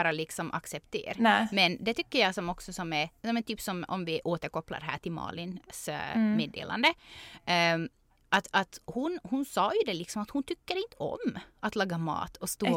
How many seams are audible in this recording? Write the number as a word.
zero